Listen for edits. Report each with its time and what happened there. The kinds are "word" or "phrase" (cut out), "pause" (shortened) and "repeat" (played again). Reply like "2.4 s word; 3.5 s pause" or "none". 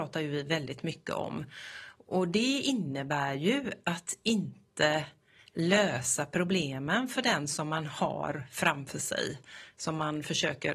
none